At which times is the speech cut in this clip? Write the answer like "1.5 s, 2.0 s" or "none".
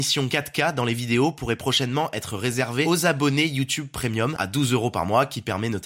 4.4 s